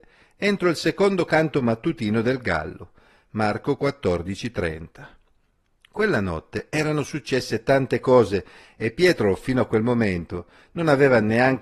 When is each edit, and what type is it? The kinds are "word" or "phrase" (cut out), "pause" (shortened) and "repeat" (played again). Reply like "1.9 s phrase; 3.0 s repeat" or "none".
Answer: none